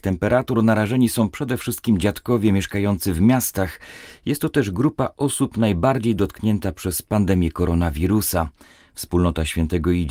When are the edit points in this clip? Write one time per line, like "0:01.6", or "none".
none